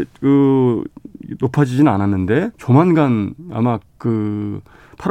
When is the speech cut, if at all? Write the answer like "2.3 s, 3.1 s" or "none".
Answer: 2.5 s, 3.9 s